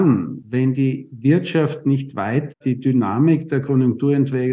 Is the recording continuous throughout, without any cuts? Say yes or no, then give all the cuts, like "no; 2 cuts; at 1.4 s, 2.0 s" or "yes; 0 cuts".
yes; 0 cuts